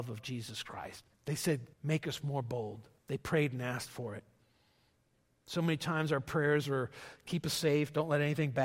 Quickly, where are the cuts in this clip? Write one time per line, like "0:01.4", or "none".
0:01.1
0:01.7
0:03.0